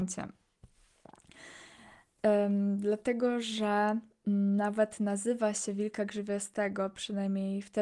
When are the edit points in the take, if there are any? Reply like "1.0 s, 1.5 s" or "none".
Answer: none

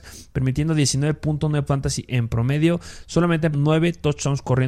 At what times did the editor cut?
1.7 s, 3.5 s

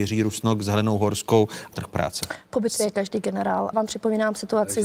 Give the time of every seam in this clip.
1.7 s, 3.7 s

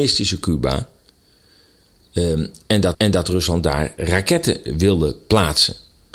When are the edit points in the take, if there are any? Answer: 2.9 s

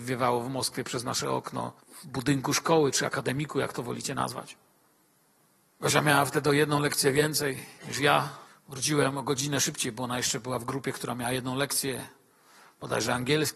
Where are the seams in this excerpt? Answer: 1.8 s, 4.9 s, 8.5 s

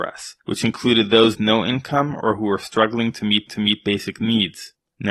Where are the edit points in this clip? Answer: 1.3 s, 3.5 s

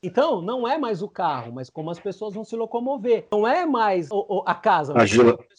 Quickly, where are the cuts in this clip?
none

